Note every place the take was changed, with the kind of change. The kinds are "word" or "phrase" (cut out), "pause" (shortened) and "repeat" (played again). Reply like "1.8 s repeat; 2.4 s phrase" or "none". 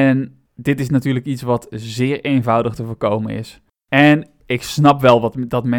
3.8 s pause